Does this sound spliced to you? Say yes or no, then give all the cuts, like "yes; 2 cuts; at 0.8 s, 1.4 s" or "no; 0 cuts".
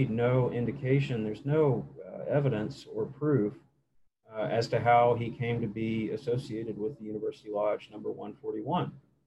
no; 0 cuts